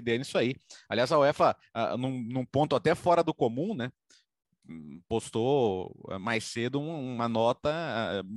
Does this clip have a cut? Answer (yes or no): no